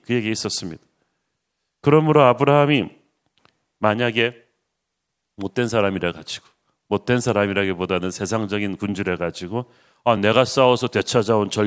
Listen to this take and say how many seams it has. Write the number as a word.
zero